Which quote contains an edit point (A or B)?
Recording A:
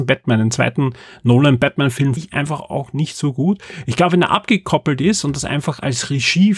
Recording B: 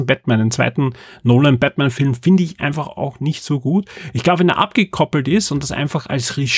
A